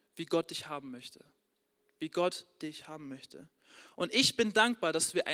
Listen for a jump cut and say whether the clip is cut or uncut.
uncut